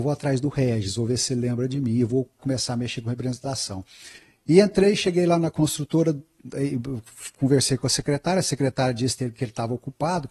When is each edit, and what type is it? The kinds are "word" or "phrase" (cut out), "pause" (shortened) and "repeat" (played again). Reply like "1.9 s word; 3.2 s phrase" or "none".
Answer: 2.4 s word